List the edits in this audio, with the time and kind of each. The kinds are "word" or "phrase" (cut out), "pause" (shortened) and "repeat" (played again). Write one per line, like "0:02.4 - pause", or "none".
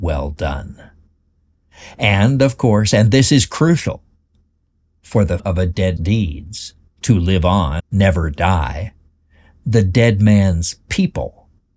0:05.4 - word
0:06.0 - word
0:07.8 - word